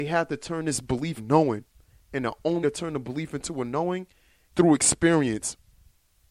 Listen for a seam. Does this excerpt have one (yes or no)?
yes